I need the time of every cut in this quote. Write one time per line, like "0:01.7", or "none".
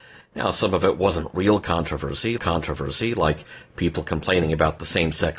0:02.4